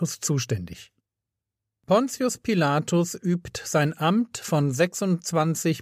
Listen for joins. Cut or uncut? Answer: uncut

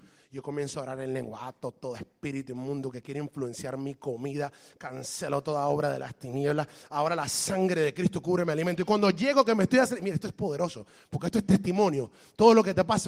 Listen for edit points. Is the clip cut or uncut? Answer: uncut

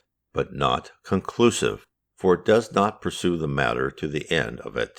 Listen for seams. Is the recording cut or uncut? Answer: uncut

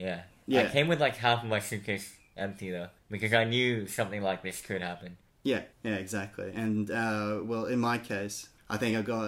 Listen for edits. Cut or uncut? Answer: cut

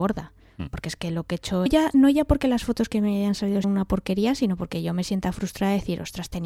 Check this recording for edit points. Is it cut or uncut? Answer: cut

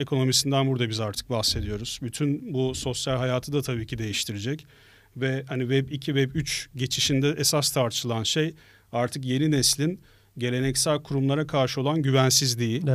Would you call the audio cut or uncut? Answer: uncut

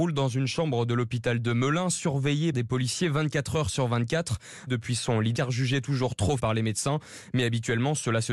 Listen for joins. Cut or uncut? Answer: cut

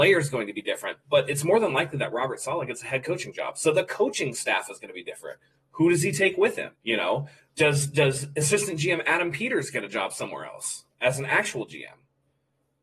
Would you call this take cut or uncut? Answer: cut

